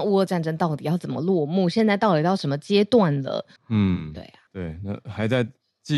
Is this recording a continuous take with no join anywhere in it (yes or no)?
no